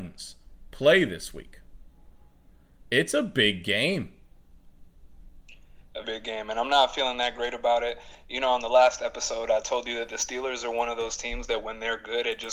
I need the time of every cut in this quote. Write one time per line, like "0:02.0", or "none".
0:06.0